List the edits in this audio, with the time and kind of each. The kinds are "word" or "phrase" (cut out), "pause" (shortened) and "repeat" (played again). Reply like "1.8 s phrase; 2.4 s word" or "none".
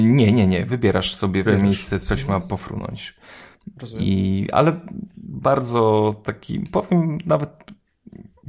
1.5 s phrase